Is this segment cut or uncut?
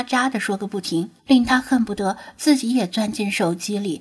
cut